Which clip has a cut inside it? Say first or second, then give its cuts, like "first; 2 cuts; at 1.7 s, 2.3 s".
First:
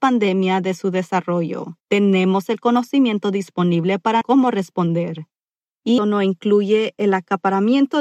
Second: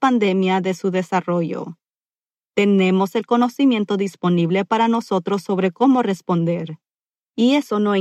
first; 3 cuts; at 1.8 s, 4.2 s, 6.0 s